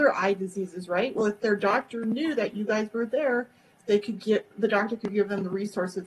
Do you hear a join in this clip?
no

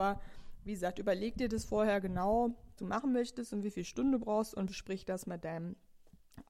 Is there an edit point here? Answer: yes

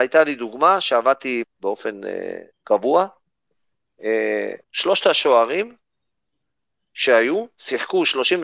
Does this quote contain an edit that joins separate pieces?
yes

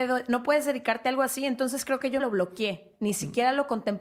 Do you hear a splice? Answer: yes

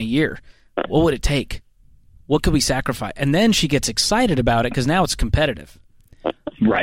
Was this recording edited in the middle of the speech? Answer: no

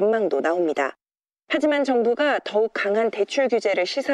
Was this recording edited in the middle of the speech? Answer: no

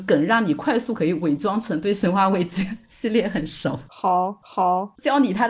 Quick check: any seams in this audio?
yes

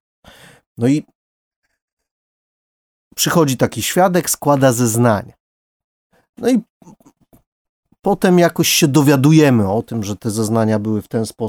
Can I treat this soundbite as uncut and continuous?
yes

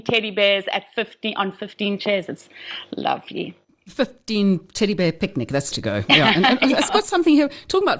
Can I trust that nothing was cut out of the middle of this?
no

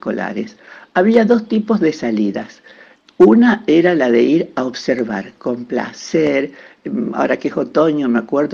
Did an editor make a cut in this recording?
no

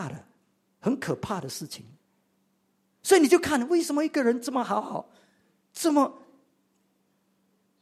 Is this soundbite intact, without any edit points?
yes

